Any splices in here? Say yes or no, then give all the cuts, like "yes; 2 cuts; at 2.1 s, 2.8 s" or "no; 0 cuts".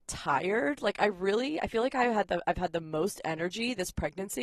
no; 0 cuts